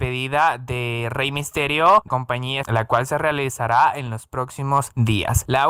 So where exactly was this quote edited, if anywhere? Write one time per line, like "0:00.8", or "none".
0:02.1
0:02.6